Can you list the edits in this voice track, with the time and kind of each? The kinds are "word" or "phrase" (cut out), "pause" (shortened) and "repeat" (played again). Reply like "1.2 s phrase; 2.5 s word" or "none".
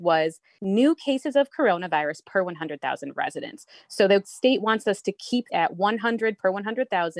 5.5 s word